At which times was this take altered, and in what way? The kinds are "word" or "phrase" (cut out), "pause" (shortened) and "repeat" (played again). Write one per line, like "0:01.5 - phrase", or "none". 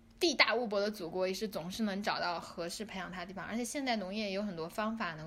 none